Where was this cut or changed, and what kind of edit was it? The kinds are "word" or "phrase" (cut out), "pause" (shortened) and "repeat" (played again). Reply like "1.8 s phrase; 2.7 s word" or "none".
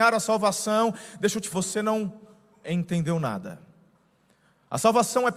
1.5 s word